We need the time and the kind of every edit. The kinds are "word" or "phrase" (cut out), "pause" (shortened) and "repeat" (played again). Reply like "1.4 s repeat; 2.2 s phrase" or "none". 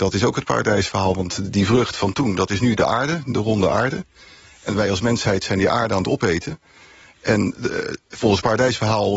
none